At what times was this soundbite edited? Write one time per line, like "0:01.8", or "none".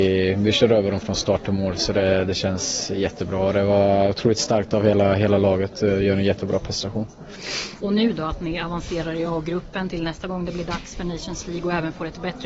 none